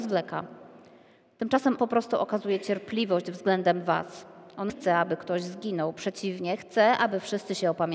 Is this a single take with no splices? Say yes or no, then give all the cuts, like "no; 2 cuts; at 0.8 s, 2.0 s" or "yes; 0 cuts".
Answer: no; 2 cuts; at 1.8 s, 4.7 s